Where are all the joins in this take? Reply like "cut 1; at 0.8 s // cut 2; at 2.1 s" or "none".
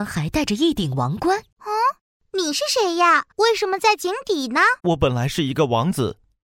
cut 1; at 1.5 s // cut 2; at 3.3 s // cut 3; at 4.8 s

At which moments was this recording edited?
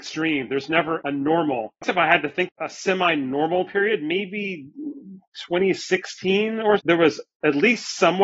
cut 1; at 1.0 s // cut 2; at 1.8 s // cut 3; at 2.5 s // cut 4; at 3.7 s // cut 5; at 6.8 s

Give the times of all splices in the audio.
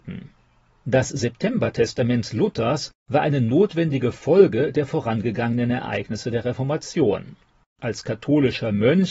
none

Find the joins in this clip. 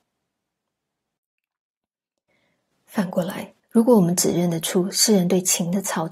cut 1; at 3.6 s

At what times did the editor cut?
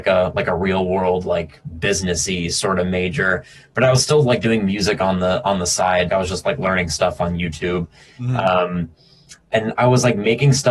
cut 1; at 6.1 s

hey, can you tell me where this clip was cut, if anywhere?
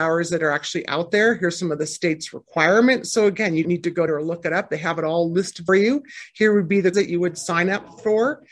cut 1; at 3.6 s // cut 2; at 4.1 s // cut 3; at 5.7 s // cut 4; at 6.9 s

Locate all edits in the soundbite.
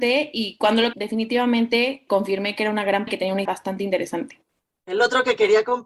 cut 1; at 0.9 s // cut 2; at 2.1 s // cut 3; at 3.1 s // cut 4; at 3.5 s

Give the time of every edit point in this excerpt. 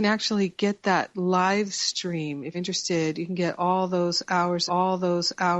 cut 1; at 2.5 s // cut 2; at 4.7 s

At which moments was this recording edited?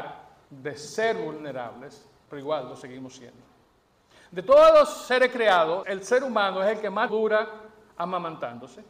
cut 1; at 5.8 s // cut 2; at 7.1 s

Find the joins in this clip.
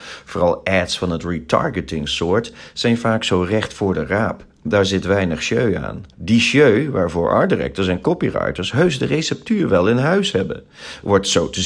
cut 1; at 6.1 s

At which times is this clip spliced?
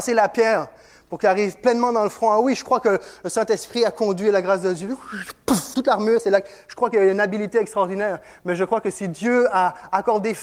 cut 1; at 5.7 s

